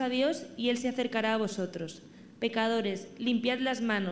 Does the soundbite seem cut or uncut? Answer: uncut